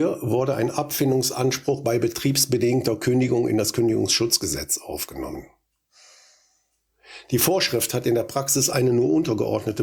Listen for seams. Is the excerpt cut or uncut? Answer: uncut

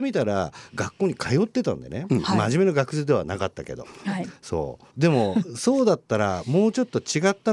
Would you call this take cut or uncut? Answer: cut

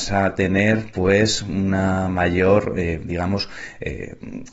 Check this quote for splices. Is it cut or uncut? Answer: uncut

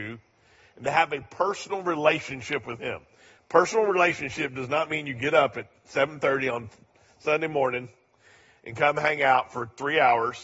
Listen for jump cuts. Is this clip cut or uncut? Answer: uncut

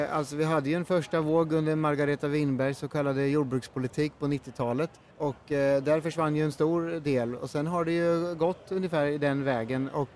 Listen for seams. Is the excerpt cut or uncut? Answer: cut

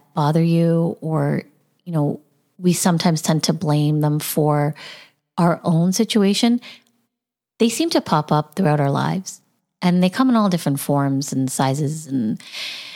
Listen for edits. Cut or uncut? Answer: uncut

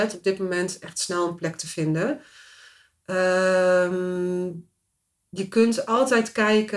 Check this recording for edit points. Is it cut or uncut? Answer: uncut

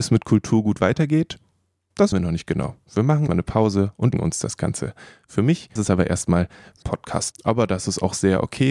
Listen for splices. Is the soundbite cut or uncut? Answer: cut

